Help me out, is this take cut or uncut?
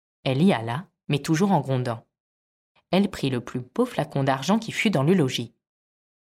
uncut